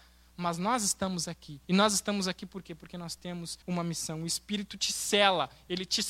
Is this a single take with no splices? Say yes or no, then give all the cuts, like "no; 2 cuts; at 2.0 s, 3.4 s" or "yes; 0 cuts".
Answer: no; 2 cuts; at 1.6 s, 3.6 s